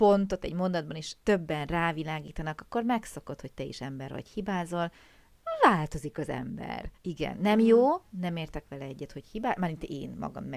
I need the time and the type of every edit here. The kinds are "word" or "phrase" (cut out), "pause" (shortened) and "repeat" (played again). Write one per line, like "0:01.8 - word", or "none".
0:01.2 - pause
0:06.9 - pause